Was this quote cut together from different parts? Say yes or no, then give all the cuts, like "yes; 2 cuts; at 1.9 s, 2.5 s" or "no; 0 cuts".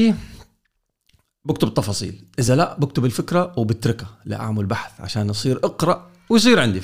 no; 0 cuts